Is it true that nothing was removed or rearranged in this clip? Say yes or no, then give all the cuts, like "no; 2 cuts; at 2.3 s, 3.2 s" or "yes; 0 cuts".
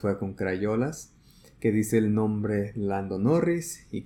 yes; 0 cuts